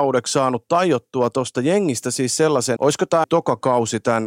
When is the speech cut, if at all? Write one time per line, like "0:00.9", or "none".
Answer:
0:02.8
0:03.2

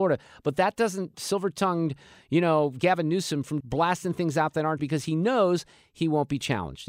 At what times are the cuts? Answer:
0:01.1
0:03.6
0:04.8

